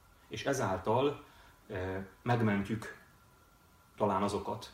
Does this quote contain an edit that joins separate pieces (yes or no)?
no